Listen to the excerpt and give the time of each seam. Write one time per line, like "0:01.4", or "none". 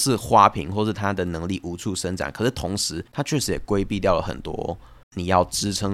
0:03.1
0:05.0